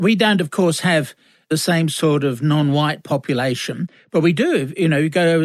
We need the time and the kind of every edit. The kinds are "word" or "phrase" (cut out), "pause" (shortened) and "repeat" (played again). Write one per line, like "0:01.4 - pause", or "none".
none